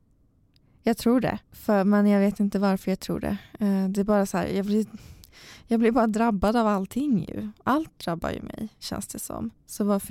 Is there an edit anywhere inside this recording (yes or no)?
yes